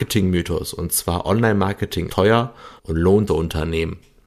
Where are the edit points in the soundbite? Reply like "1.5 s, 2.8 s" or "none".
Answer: 2.1 s, 2.8 s, 3.3 s